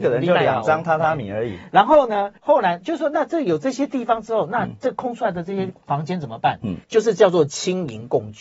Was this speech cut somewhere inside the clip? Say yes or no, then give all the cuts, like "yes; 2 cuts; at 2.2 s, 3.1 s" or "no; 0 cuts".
yes; 2 cuts; at 2.4 s, 6.8 s